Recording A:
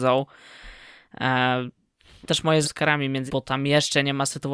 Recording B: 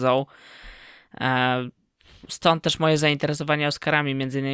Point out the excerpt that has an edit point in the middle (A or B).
A